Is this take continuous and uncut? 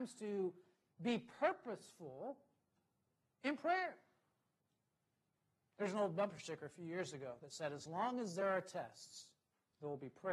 yes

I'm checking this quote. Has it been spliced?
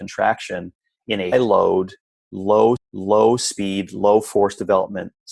yes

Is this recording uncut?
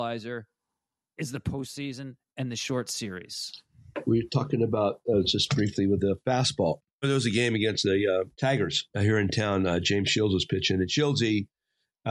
no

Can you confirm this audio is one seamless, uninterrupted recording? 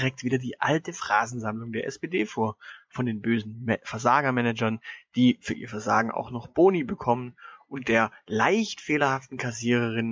yes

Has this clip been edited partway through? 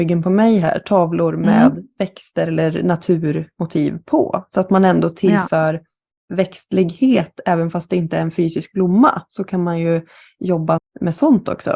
yes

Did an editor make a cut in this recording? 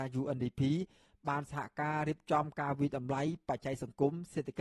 no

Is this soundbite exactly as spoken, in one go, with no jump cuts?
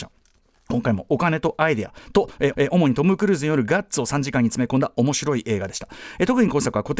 no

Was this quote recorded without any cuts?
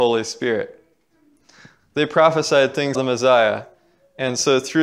no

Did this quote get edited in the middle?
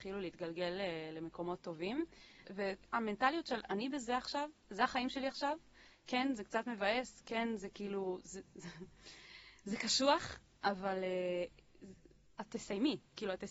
no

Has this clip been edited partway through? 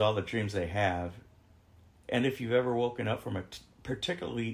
no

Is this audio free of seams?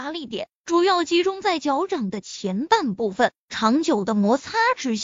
yes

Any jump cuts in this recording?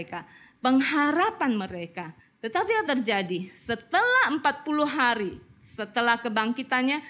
yes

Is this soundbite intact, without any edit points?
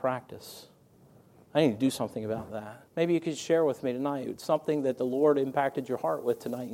no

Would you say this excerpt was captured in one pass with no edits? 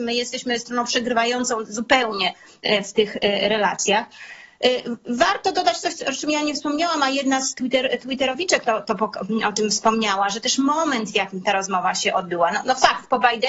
yes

